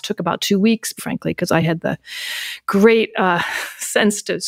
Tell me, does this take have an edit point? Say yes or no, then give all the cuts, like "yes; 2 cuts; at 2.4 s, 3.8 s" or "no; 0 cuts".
no; 0 cuts